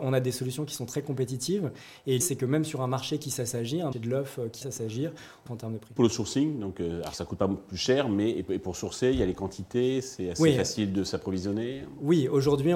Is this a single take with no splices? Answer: no; 5 cuts; at 2.2 s, 3.9 s, 4.6 s, 5.5 s, 6.0 s

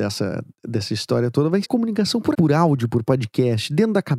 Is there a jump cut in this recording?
yes; 2 cuts; at 1.6 s, 2.3 s

